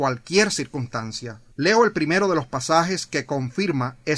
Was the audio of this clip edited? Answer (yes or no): yes